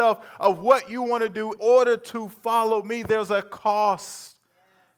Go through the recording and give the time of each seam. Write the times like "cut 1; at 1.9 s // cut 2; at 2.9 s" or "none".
cut 1; at 1.6 s